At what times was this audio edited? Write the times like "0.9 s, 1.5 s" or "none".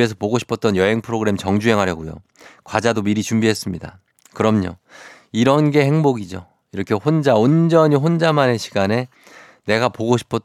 none